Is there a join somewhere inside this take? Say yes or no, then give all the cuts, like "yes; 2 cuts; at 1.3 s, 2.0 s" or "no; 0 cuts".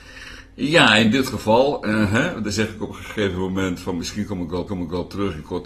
yes; 1 cut; at 4.7 s